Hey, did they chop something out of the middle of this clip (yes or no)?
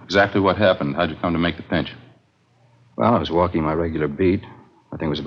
no